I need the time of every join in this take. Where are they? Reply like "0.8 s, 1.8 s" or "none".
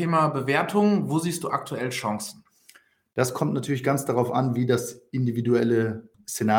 none